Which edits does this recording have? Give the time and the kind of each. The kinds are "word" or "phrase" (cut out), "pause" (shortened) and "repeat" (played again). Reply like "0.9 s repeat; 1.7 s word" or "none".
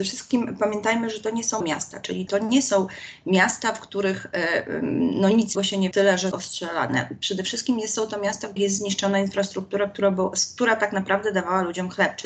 1.6 s word; 2.3 s word; 5.5 s word; 5.9 s word; 6.3 s word; 8.6 s word